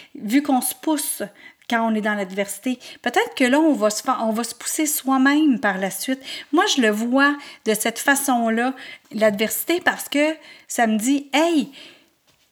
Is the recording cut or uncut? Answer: uncut